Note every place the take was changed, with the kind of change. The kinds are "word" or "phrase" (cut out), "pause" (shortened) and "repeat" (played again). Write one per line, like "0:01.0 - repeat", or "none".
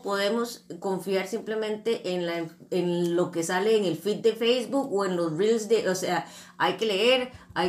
none